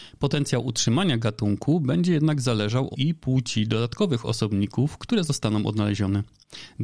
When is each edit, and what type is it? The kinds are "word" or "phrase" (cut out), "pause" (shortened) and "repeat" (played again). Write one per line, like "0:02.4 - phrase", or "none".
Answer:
0:02.9 - phrase